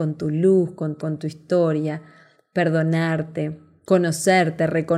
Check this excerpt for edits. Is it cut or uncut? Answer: cut